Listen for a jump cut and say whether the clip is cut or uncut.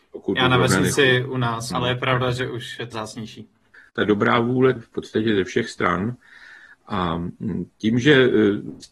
cut